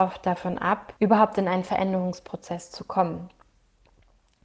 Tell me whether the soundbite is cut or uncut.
cut